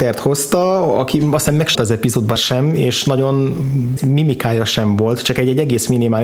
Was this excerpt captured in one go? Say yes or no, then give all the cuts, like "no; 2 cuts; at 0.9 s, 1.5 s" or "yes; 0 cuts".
no; 3 cuts; at 1.7 s, 2.4 s, 4.0 s